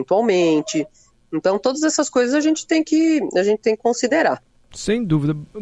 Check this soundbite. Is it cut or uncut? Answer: uncut